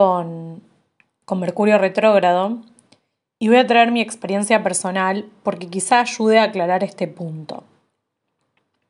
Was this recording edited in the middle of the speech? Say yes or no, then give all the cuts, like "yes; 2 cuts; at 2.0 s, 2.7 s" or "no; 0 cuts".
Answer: no; 0 cuts